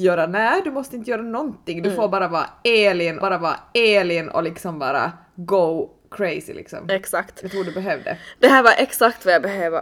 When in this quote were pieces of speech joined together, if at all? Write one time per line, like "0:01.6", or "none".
0:03.2